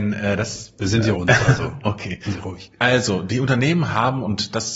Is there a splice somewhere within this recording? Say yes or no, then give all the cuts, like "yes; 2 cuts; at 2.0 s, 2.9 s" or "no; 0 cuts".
yes; 2 cuts; at 1.1 s, 2.3 s